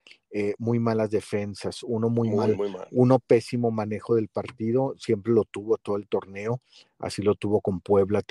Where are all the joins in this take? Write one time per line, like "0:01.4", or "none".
none